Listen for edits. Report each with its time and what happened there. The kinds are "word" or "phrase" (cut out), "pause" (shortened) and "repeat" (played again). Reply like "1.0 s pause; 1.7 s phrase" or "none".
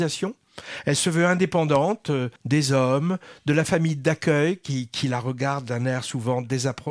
2.4 s pause